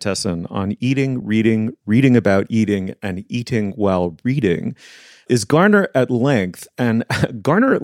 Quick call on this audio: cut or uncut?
uncut